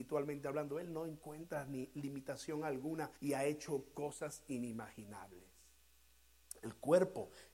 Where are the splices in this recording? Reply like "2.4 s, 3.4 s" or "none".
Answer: 3.2 s